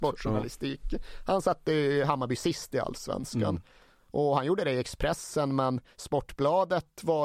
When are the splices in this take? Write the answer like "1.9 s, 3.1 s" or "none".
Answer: none